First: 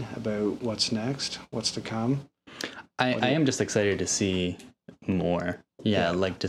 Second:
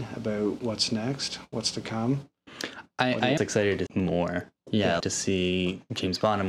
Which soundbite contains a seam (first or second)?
second